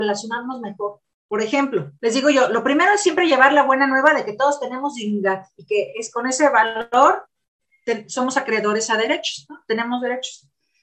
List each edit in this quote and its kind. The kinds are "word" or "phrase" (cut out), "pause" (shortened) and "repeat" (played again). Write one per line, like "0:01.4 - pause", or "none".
0:02.0 - pause